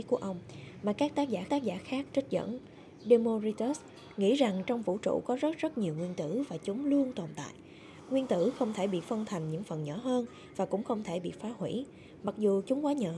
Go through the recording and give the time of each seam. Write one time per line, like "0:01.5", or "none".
0:01.5